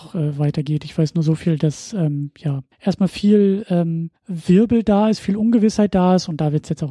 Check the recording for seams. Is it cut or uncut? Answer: cut